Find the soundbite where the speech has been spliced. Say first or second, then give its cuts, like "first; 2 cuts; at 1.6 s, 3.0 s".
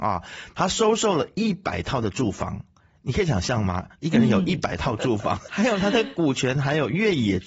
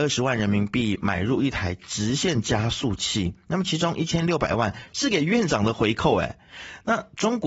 first; 1 cut; at 5.5 s